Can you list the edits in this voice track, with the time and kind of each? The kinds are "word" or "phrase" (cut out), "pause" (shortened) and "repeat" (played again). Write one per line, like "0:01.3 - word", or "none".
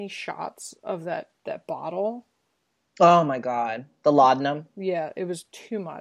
0:01.4 - pause